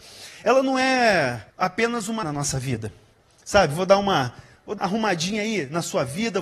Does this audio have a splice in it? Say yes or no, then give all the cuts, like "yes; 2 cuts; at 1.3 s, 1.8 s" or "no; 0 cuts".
yes; 3 cuts; at 1.5 s, 2.2 s, 4.8 s